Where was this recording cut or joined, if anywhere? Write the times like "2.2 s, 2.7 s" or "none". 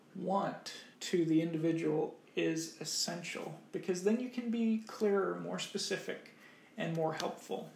0.9 s